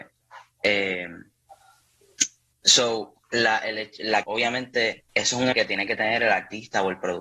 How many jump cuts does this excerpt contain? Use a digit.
4